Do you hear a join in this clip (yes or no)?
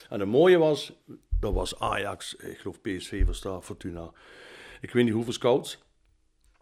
no